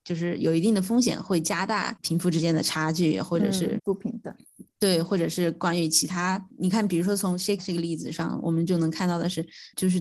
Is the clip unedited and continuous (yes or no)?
no